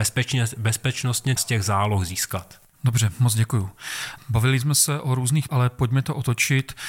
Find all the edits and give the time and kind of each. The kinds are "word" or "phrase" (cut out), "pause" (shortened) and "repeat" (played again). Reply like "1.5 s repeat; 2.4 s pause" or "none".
1.4 s phrase; 5.5 s word